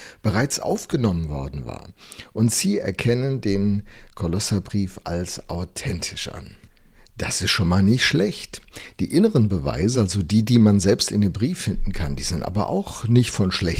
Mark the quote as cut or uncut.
uncut